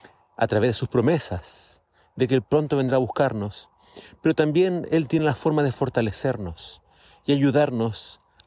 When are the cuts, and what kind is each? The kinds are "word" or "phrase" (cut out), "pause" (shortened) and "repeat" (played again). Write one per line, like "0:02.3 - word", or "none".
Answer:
none